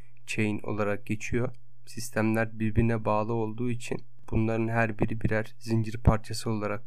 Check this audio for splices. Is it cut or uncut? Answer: uncut